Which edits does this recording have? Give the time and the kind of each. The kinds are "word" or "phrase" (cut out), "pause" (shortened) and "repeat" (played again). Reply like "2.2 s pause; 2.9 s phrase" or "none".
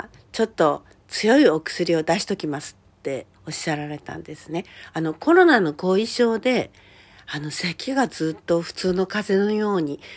3.3 s pause